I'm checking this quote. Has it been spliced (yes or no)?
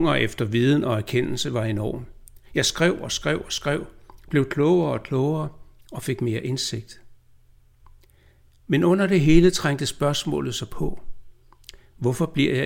no